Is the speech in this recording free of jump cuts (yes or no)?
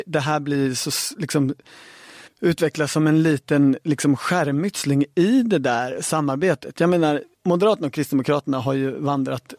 no